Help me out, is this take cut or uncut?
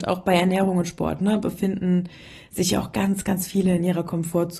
uncut